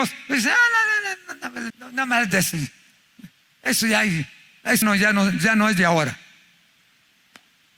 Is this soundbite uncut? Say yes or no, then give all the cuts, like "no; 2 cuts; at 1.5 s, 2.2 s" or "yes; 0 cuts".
no; 2 cuts; at 1.7 s, 4.8 s